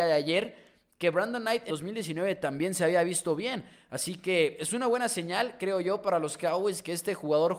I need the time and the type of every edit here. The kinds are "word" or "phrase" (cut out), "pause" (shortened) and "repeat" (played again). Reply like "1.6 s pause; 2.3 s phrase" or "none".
1.7 s word